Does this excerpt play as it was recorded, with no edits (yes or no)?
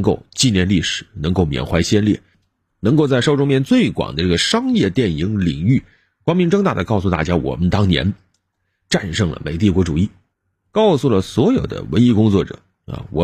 yes